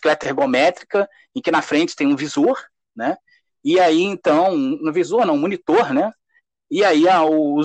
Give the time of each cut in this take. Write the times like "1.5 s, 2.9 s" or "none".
none